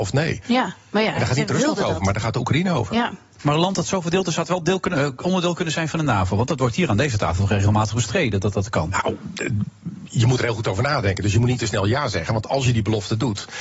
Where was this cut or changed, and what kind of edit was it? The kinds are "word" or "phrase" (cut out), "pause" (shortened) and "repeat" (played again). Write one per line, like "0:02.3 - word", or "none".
none